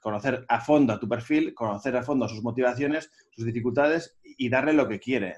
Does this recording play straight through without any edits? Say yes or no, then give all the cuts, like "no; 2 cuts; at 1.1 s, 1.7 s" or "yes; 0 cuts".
yes; 0 cuts